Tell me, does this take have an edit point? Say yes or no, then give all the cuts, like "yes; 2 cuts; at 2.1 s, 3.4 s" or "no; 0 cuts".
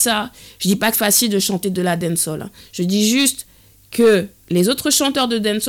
yes; 1 cut; at 0.9 s